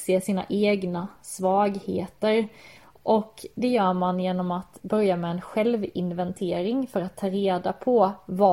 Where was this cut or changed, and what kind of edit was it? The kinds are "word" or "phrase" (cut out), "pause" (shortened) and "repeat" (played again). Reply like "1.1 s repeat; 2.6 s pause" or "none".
none

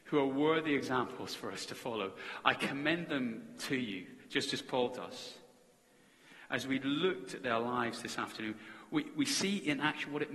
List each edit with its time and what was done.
none

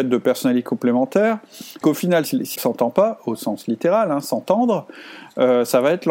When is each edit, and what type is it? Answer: 1.8 s word; 2.3 s word; 2.6 s word

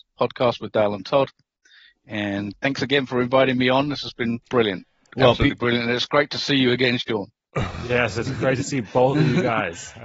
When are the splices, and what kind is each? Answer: 2.5 s phrase; 4.4 s pause

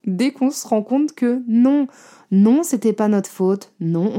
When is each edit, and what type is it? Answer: none

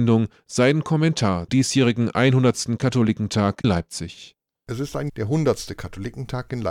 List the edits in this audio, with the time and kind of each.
1.5 s word; 3.6 s word; 5.1 s word

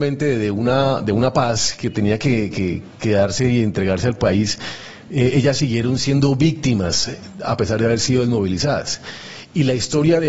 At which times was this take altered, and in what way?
none

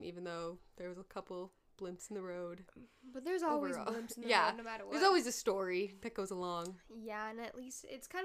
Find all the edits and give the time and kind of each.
none

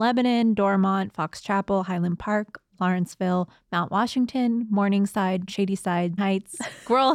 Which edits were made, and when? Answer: 6.2 s word

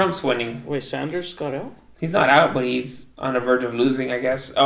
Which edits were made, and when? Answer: none

